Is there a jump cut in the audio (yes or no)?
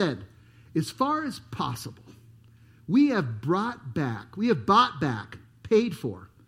no